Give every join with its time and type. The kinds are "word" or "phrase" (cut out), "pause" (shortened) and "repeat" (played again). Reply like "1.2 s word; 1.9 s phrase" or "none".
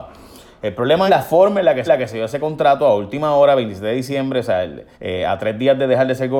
1.1 s word; 1.9 s repeat; 4.9 s pause